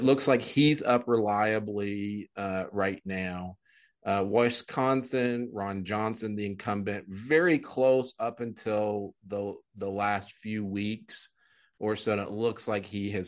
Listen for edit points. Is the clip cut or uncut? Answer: uncut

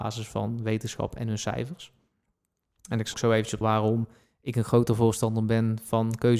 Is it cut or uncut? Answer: cut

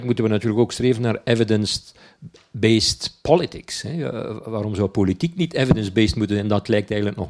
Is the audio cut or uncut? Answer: uncut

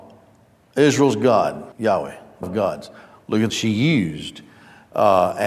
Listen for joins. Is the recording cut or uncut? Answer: cut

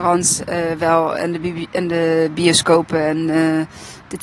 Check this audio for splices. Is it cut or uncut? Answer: uncut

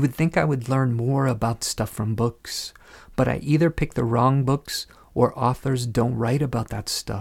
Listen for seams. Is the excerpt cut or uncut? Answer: cut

